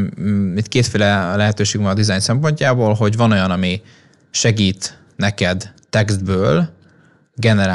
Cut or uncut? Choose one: uncut